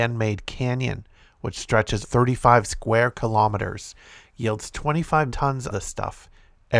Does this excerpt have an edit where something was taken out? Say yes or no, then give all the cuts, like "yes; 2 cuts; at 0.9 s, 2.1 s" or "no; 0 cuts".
yes; 3 cuts; at 2.0 s, 5.3 s, 5.7 s